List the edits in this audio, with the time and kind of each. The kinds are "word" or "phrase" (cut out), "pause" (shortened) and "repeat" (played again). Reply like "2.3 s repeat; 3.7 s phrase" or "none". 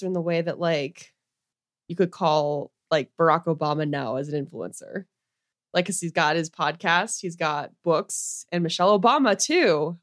2.8 s pause